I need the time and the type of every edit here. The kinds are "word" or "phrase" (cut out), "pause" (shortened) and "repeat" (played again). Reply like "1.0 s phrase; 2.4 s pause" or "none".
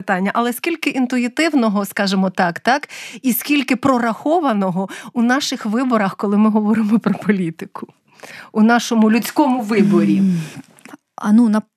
none